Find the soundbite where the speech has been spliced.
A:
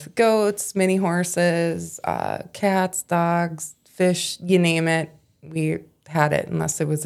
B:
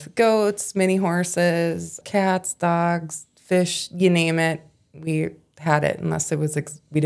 B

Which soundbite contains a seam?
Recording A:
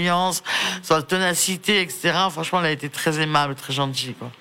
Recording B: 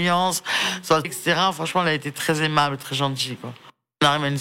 B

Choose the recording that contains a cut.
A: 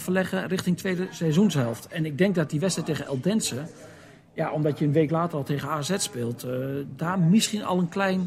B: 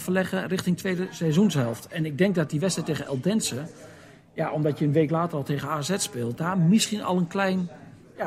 B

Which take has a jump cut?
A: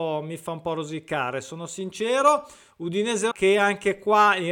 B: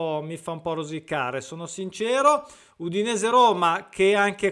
A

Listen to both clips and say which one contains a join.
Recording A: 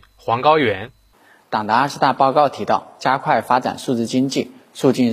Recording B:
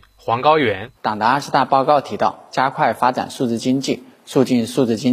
B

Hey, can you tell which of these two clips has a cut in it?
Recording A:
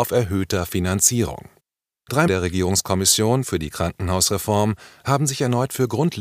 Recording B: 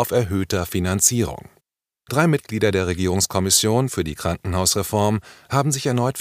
A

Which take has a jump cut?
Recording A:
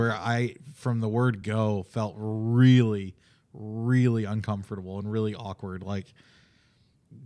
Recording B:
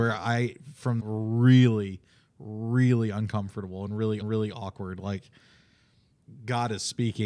B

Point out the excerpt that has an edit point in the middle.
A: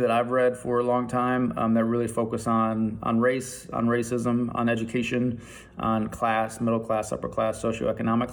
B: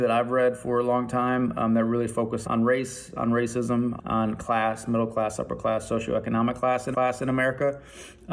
B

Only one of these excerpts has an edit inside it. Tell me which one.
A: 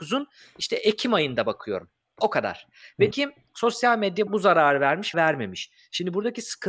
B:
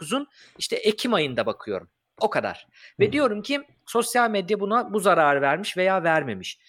A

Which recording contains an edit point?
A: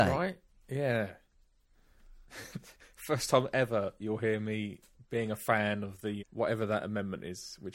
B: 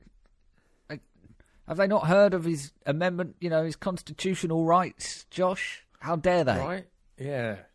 A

